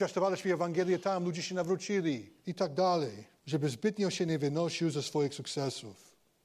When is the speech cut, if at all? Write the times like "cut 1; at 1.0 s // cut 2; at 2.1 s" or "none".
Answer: cut 1; at 2.4 s // cut 2; at 3.4 s